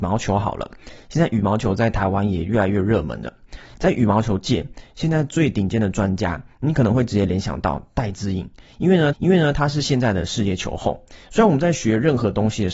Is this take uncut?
no; 2 cuts; at 9.1 s, 11.2 s

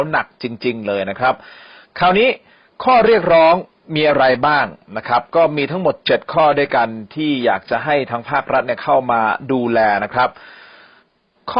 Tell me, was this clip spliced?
no; 0 cuts

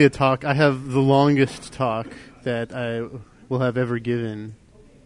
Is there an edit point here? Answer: no; 0 cuts

